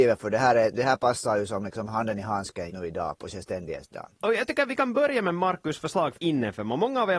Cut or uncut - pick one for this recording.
cut